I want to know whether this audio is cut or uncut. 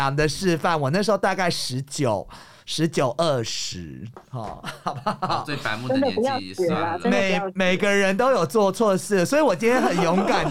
uncut